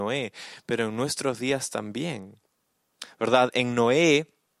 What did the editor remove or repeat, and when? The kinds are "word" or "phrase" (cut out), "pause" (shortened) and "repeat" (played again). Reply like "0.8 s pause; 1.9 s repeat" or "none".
none